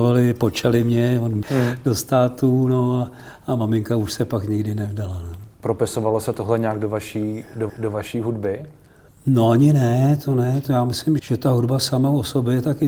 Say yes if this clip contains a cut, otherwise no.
yes